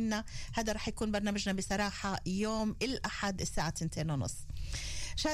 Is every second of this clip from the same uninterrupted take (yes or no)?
yes